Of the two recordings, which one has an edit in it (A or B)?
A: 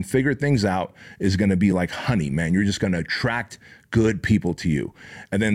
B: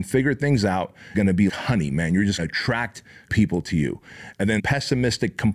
B